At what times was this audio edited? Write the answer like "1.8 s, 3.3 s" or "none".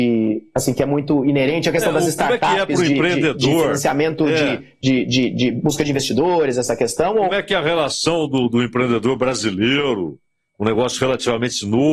none